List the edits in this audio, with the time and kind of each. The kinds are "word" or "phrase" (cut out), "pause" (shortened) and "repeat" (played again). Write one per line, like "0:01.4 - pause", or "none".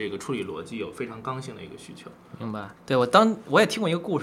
0:02.8 - pause

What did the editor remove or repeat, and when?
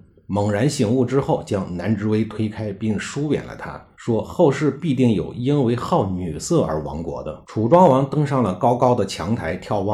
0:03.9 - pause
0:07.4 - pause

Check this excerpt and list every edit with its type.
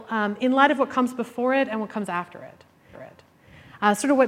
0:02.9 - repeat

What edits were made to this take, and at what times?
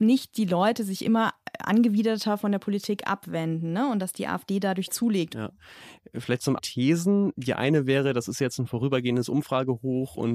0:06.6 - phrase

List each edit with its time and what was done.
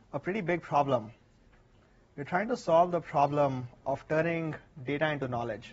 none

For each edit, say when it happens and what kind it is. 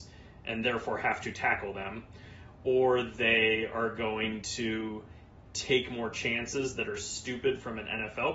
none

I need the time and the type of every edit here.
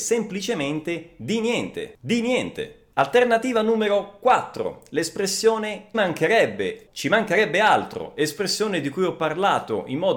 0:05.9 - word
0:06.9 - word

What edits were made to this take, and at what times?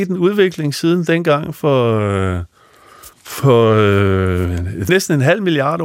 0:03.1 - pause
0:04.9 - word

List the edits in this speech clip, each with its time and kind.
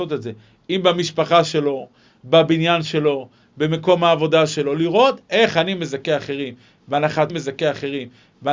0:07.3 - repeat

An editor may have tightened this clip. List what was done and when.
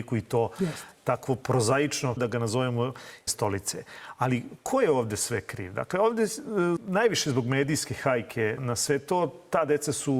0:02.2 - phrase
0:03.3 - word
0:06.8 - word
0:08.6 - word

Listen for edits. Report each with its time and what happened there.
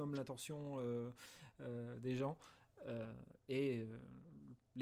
none

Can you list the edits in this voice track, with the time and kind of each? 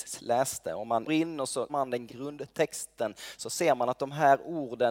0:01.1 - word
0:01.7 - word
0:02.1 - word

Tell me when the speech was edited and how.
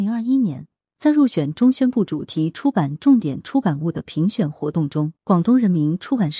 0:05.2 - pause

